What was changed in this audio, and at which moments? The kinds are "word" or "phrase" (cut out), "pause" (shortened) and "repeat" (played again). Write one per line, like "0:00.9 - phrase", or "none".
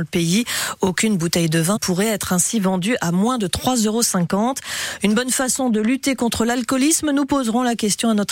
0:01.8 - word

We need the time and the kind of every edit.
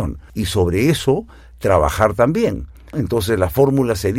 none

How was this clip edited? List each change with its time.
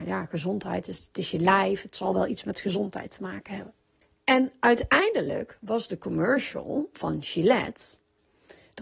0:04.0 - pause

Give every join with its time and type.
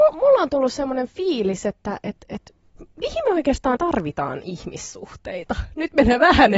0:03.8 - word

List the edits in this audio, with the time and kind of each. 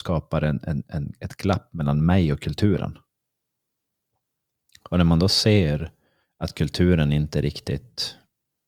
0:06.2 - pause

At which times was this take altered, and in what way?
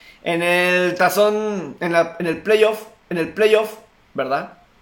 0:03.1 - repeat

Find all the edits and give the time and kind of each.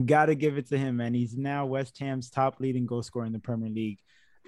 none

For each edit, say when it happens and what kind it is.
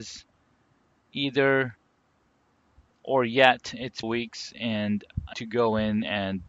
0:04.0 - phrase
0:05.3 - word

